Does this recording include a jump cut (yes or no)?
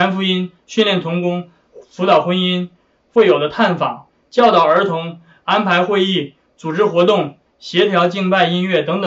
no